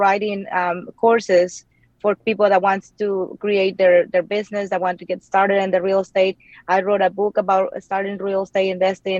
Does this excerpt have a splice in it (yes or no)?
no